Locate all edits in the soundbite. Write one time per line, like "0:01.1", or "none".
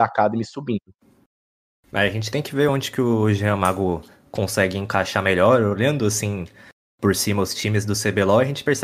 none